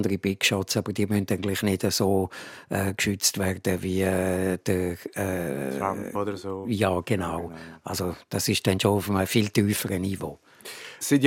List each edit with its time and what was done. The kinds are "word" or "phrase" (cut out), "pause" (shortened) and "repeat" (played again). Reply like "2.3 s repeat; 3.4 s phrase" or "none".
none